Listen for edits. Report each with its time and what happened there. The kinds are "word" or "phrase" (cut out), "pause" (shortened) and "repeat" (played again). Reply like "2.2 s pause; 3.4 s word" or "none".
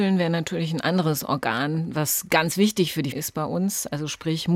3.1 s word